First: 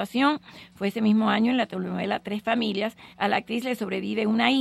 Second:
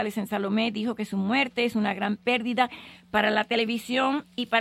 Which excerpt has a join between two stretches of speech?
first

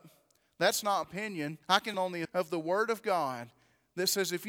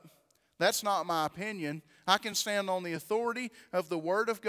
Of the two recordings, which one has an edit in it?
first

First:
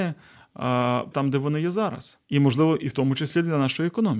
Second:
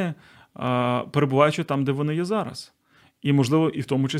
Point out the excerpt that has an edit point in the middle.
first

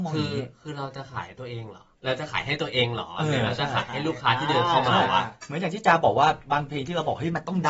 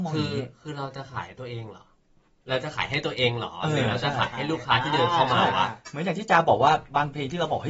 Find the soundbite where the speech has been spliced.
first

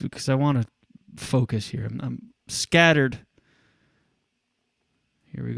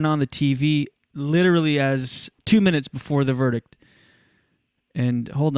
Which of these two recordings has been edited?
second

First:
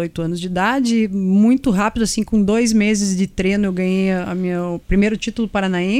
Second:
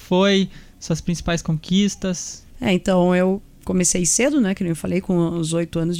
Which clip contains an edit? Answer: second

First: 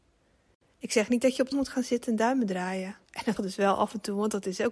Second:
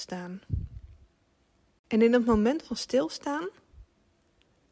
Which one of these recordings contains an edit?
first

